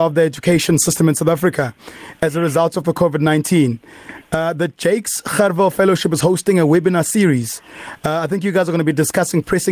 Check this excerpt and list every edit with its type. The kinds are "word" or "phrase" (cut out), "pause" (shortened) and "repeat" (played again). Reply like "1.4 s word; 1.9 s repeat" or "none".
none